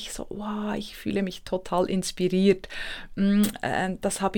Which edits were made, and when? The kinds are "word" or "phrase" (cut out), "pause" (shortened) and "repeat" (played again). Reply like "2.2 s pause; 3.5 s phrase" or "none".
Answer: none